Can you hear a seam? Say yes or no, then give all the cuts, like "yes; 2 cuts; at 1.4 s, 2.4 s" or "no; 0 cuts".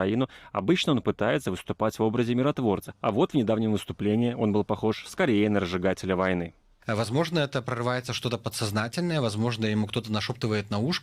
yes; 1 cut; at 6.6 s